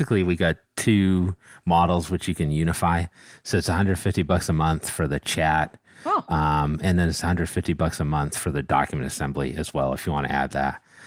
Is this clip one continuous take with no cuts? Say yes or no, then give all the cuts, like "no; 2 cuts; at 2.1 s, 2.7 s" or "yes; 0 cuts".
yes; 0 cuts